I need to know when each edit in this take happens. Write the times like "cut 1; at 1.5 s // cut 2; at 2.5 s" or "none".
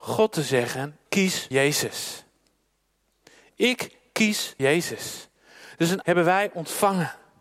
cut 1; at 1.1 s // cut 2; at 1.5 s // cut 3; at 4.6 s // cut 4; at 6.0 s

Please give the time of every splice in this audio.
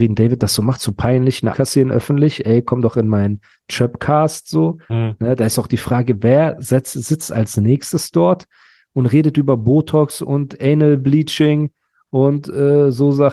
cut 1; at 1.5 s

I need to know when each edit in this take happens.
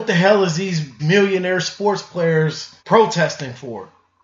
cut 1; at 1.0 s // cut 2; at 2.8 s

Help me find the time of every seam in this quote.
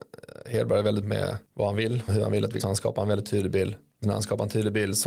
cut 1; at 1.0 s // cut 2; at 2.1 s // cut 3; at 2.6 s // cut 4; at 4.0 s

